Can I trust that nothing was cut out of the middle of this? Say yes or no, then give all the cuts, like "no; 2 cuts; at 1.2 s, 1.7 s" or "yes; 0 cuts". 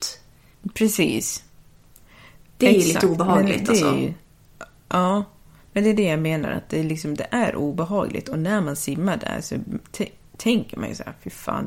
yes; 0 cuts